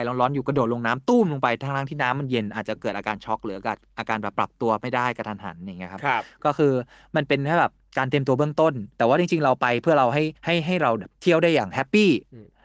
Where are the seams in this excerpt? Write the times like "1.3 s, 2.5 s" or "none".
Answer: 8.9 s, 10.4 s